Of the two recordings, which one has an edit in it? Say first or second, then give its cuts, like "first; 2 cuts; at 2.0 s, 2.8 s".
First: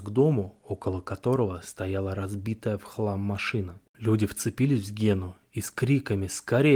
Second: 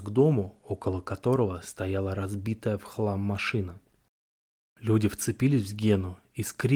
first; 1 cut; at 3.9 s